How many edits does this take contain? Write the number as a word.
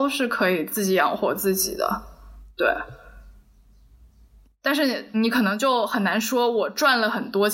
one